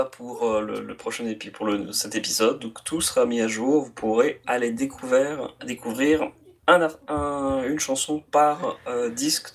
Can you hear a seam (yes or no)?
no